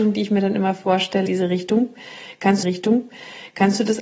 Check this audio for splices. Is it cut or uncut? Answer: cut